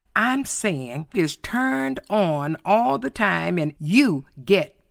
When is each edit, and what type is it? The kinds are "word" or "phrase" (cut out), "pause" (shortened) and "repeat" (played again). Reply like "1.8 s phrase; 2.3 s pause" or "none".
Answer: 1.1 s word; 3.8 s word